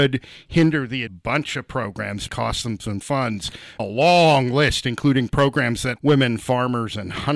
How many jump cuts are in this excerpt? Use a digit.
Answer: 5